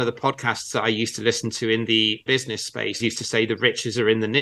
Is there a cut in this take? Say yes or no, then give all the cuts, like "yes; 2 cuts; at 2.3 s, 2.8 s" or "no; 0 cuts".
yes; 2 cuts; at 2.3 s, 3.0 s